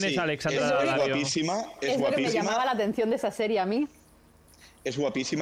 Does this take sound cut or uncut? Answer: uncut